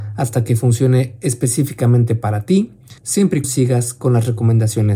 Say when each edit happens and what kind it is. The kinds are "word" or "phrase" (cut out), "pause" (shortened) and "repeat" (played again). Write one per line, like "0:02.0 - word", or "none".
0:03.0 - pause
0:03.4 - word